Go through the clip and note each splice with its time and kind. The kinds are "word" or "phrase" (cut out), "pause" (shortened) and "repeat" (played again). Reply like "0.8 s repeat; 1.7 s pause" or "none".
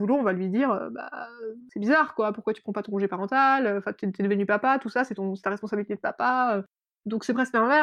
none